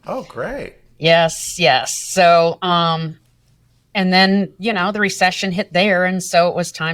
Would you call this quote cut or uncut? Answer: uncut